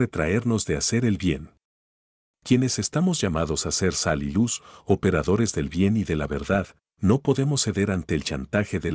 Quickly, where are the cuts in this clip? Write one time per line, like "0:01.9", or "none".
none